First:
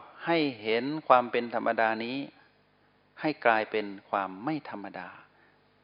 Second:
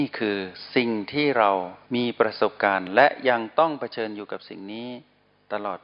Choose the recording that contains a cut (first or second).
second